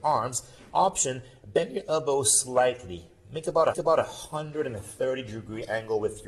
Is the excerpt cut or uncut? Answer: cut